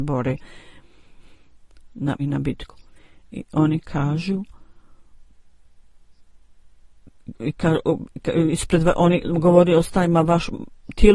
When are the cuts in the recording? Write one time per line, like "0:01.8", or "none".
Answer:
0:02.2
0:07.4